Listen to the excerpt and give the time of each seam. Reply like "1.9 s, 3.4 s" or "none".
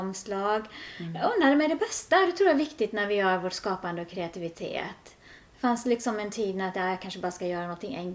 none